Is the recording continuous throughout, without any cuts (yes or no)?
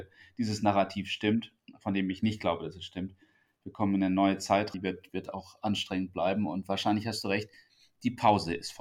no